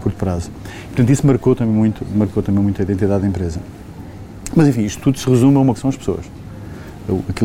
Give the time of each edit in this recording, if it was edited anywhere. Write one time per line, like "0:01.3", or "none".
0:05.7